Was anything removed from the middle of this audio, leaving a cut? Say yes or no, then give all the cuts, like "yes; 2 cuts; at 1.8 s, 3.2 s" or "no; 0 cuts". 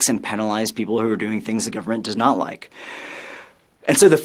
no; 0 cuts